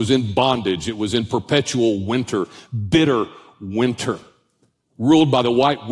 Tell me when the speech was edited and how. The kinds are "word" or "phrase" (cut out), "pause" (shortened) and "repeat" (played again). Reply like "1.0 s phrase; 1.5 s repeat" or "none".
none

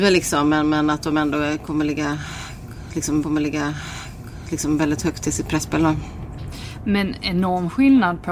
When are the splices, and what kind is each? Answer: 3.2 s repeat

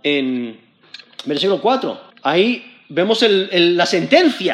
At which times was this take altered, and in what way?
2.1 s pause

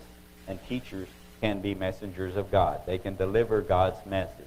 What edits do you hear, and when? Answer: none

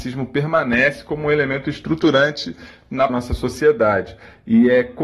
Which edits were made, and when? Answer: 3.1 s phrase

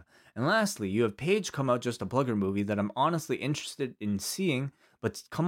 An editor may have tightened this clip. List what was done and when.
none

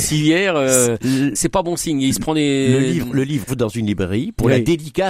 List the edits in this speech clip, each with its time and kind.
1.3 s word; 3.5 s word

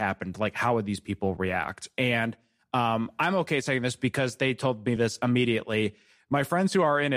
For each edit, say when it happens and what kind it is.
none

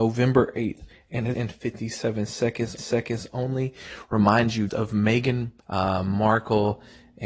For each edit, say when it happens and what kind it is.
1.3 s phrase; 2.8 s repeat; 4.7 s word; 5.6 s pause

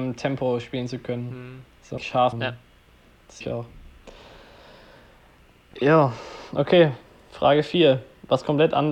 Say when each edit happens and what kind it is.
2.0 s word; 2.3 s phrase; 3.4 s word

